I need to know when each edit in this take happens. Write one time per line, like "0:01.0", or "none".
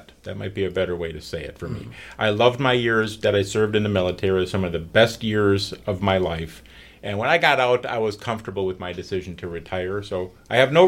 none